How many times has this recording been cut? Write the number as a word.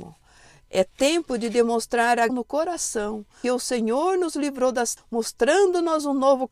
three